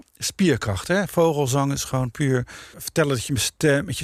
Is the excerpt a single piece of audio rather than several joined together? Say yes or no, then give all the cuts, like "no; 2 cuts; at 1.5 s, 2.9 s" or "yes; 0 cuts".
no; 1 cut; at 2.7 s